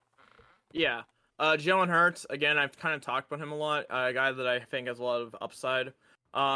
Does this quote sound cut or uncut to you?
uncut